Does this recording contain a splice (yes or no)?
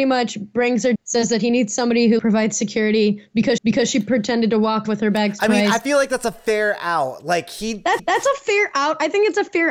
yes